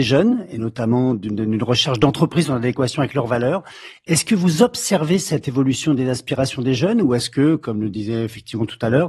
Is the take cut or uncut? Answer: uncut